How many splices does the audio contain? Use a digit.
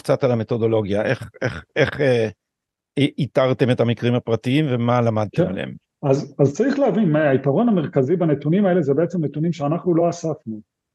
0